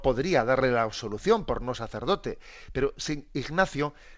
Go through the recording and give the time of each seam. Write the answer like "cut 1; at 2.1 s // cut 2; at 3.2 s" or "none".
cut 1; at 1.7 s